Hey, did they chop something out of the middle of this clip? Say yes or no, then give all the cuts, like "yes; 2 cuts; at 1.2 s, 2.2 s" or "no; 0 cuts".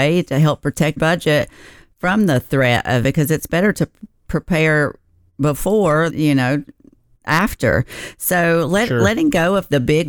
yes; 3 cuts; at 1.0 s, 3.0 s, 6.1 s